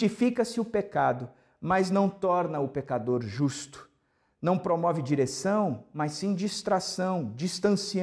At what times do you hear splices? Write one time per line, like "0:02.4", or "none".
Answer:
none